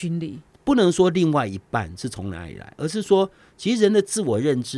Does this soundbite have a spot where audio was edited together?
no; 0 cuts

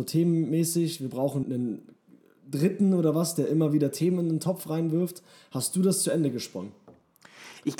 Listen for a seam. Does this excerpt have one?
yes; 1 cut; at 1.4 s

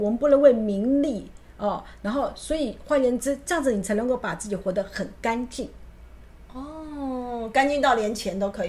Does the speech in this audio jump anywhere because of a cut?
no; 0 cuts

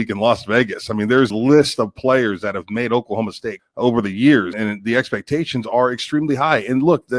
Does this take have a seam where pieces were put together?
yes; 3 cuts; at 1.3 s, 3.6 s, 4.5 s

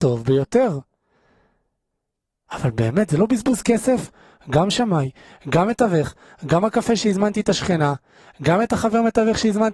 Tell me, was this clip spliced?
no; 0 cuts

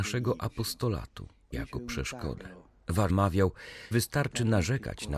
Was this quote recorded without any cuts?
no; 3 cuts; at 1.5 s, 3.1 s, 3.9 s

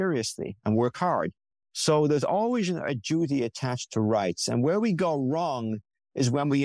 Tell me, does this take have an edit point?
no; 0 cuts

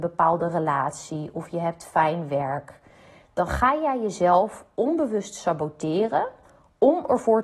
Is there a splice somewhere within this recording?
no; 0 cuts

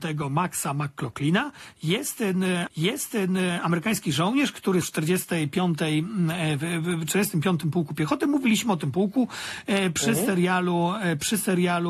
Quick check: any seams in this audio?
yes; 2 cuts; at 2.7 s, 4.8 s

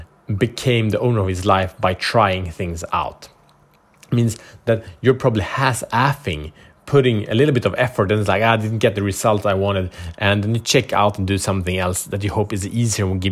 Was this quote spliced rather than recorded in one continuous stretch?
no; 0 cuts

